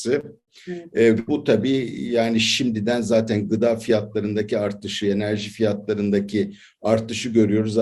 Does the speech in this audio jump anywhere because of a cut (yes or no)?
yes